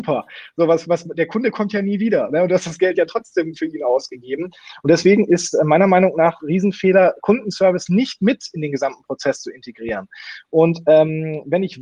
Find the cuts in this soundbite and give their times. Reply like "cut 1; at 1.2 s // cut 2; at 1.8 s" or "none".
cut 1; at 6.4 s